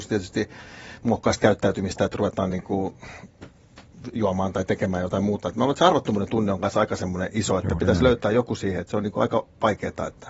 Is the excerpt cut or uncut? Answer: uncut